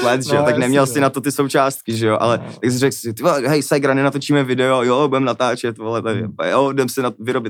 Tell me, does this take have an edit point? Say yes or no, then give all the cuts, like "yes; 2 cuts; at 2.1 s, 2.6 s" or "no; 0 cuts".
no; 0 cuts